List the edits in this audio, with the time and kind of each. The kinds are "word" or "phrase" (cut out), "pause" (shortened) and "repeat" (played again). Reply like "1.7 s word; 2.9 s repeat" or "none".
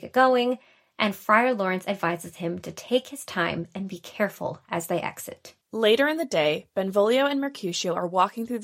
5.6 s pause